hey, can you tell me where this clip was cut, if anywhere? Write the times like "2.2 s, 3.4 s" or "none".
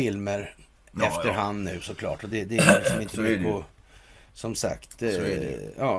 none